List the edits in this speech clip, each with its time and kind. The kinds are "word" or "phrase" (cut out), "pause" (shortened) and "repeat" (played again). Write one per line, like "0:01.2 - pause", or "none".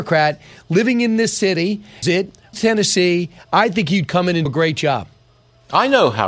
0:02.0 - word
0:02.5 - word
0:04.5 - word